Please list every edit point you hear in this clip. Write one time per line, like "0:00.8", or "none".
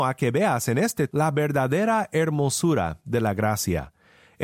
0:01.1